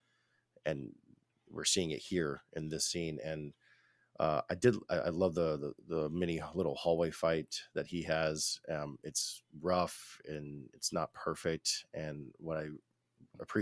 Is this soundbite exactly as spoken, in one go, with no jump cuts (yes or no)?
yes